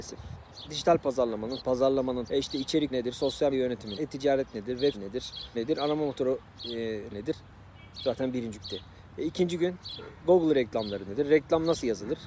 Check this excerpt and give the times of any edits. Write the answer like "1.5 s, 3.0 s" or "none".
1.6 s, 2.3 s, 2.9 s, 3.5 s, 4.0 s, 4.9 s, 5.5 s, 7.1 s, 8.5 s